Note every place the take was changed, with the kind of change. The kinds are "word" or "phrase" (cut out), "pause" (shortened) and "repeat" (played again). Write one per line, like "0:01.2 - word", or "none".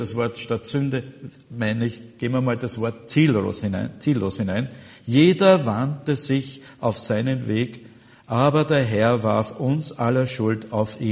none